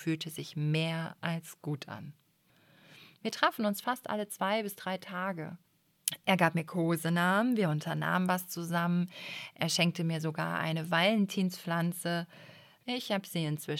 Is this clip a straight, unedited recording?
yes; 0 cuts

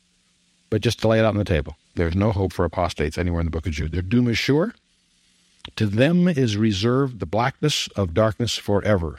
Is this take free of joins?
no; 1 cut; at 1.8 s

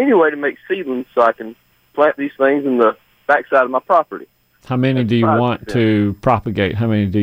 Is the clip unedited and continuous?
yes; 0 cuts

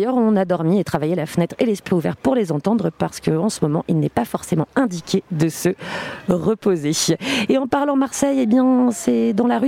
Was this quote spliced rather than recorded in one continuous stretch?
no; 0 cuts

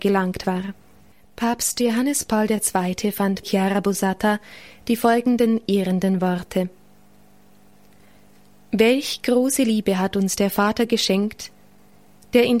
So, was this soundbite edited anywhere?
yes; 1 cut; at 3.4 s

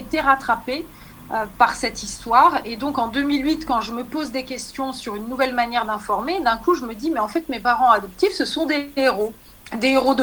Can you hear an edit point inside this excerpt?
no; 0 cuts

